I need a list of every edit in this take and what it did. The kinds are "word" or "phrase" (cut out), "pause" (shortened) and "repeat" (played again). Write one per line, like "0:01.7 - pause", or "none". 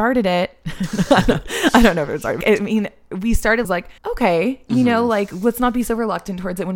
0:02.4 - word
0:03.6 - phrase
0:04.0 - pause